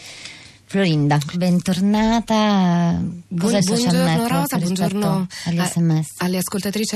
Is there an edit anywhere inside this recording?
yes; 2 cuts; at 1.3 s, 3.6 s

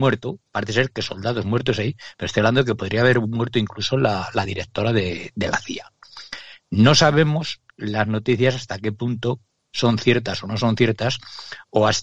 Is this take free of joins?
yes; 0 cuts

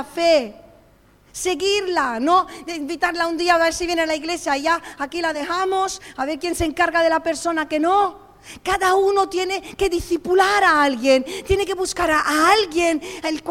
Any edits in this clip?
no; 0 cuts

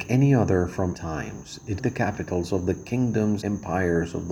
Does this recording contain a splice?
yes; 3 cuts; at 0.9 s, 1.8 s, 3.4 s

